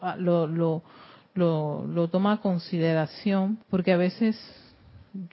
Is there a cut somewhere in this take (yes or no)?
yes